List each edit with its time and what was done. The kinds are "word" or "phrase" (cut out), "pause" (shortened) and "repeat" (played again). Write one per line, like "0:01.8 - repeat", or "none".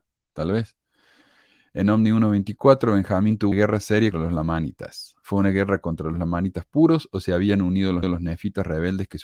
0:03.5 - word
0:04.1 - word
0:08.0 - repeat